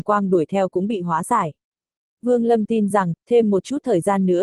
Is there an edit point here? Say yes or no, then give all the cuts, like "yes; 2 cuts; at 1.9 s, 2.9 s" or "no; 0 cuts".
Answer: no; 0 cuts